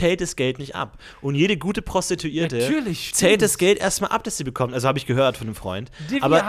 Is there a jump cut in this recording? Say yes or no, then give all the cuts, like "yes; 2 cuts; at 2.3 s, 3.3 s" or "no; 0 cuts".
no; 0 cuts